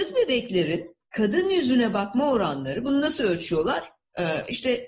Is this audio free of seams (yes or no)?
no